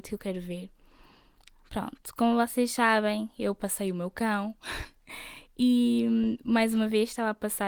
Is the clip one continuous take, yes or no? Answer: yes